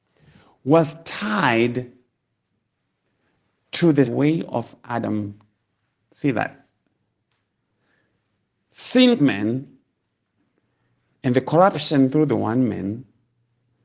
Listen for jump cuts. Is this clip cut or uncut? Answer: cut